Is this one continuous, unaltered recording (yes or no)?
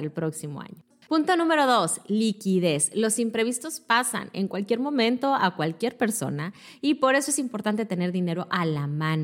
yes